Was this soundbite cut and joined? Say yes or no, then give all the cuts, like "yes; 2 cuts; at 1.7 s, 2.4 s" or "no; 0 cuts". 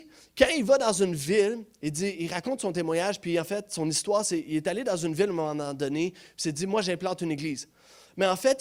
no; 0 cuts